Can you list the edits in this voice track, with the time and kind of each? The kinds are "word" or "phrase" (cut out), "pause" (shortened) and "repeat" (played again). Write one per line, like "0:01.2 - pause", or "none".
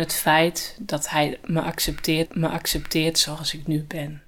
0:02.2 - repeat

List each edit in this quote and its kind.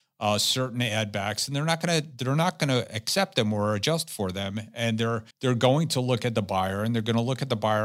0:05.3 - pause

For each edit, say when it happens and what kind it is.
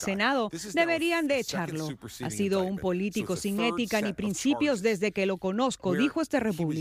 none

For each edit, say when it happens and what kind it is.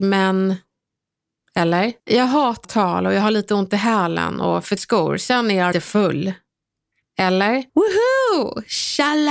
0:02.0 - pause
0:02.6 - phrase
0:04.8 - word
0:05.7 - word
0:07.7 - pause

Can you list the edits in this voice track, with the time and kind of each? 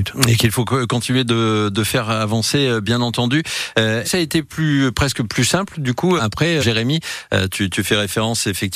0:04.0 - phrase
0:06.2 - word
0:06.6 - word

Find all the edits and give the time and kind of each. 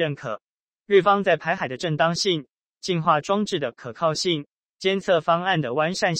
none

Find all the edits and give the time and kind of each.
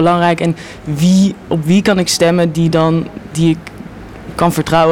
none

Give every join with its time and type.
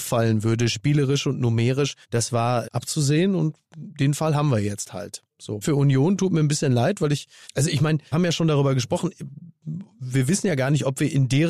0:02.0 - pause
0:02.6 - word
0:03.7 - pause
0:05.6 - word
0:07.4 - word
0:08.1 - word

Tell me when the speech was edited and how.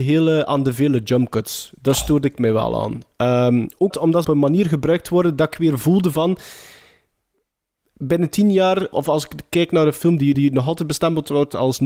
0:03.9 - word
0:04.2 - phrase
0:08.9 - word
0:10.3 - repeat

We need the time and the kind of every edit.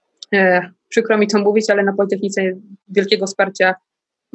none

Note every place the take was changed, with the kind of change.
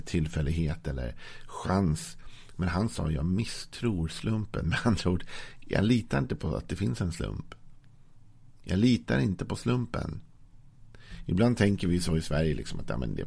none

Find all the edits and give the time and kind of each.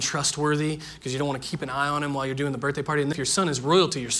0:03.1 - word

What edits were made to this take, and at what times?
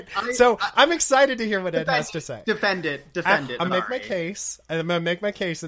0:03.7 - word

